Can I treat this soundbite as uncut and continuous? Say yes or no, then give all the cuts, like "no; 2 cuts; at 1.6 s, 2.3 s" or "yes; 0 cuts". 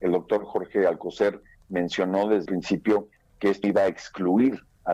no; 2 cuts; at 2.5 s, 3.6 s